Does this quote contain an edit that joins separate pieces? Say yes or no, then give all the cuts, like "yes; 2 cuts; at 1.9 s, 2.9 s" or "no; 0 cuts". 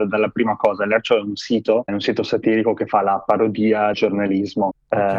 yes; 2 cuts; at 1.9 s, 3.9 s